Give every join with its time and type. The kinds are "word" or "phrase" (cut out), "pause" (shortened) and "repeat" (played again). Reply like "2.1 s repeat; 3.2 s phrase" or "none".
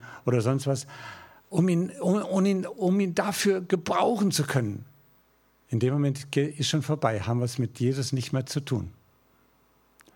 5.2 s pause

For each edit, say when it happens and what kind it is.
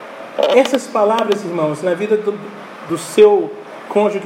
none

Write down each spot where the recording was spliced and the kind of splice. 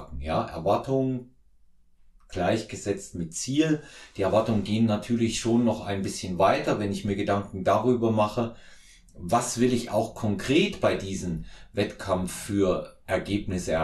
none

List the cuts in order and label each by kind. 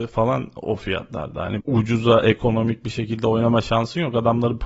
1.6 s word

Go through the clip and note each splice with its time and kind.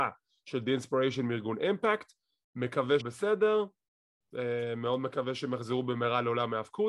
3.0 s word

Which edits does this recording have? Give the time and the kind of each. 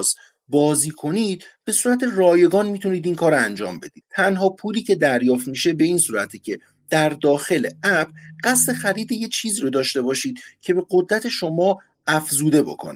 none

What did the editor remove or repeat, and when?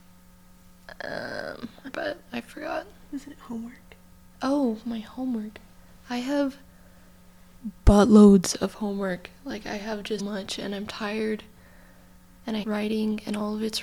1.9 s phrase; 10.2 s word; 12.6 s word

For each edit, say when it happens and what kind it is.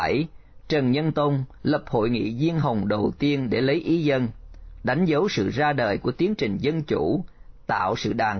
1.6 s pause

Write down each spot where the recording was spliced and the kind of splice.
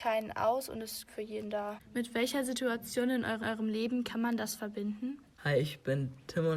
1.1 s word; 3.4 s repeat

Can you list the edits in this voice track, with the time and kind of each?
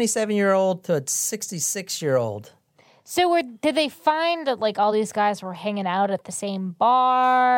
none

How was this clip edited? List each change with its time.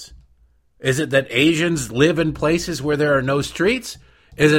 none

